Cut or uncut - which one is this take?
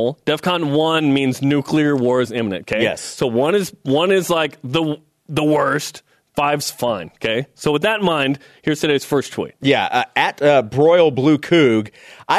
uncut